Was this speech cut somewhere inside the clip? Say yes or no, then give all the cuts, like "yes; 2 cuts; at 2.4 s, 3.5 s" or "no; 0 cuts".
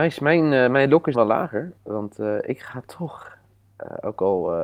yes; 2 cuts; at 1.1 s, 1.8 s